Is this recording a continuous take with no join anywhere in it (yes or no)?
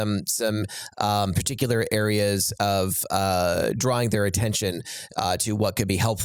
yes